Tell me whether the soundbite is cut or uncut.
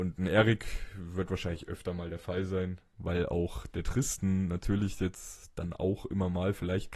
uncut